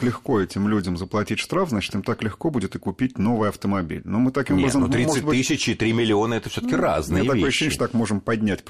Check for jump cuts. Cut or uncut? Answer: cut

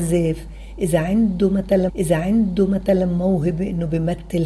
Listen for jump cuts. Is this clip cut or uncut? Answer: cut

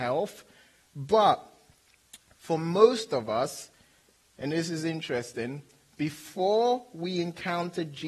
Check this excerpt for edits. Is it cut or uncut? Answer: uncut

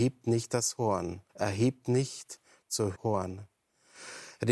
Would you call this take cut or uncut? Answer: cut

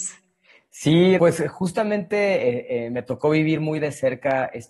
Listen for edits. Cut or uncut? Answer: cut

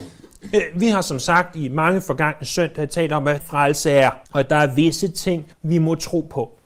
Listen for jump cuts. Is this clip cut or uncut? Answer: cut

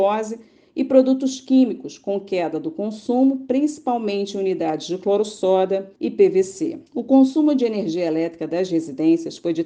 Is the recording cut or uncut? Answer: cut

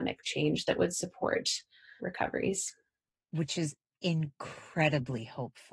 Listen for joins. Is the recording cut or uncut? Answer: cut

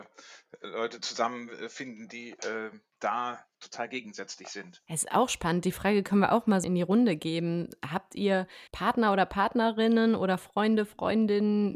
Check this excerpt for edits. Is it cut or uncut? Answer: cut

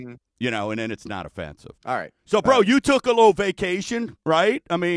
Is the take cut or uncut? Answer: cut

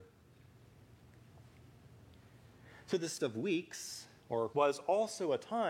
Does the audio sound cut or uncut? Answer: cut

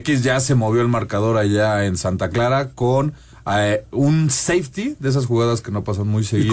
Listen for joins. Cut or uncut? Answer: uncut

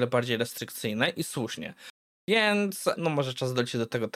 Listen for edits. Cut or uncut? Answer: cut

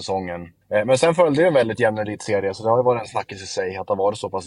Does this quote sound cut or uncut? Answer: uncut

